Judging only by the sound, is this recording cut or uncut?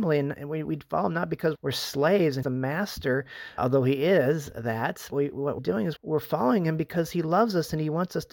cut